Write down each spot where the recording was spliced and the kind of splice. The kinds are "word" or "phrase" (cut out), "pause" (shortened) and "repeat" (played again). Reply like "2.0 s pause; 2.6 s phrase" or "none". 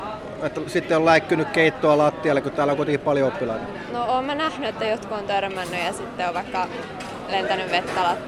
none